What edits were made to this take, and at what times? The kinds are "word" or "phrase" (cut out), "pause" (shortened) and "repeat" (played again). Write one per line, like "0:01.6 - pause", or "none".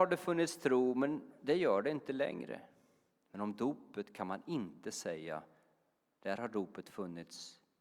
none